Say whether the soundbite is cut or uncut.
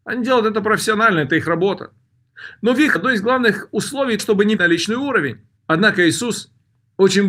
cut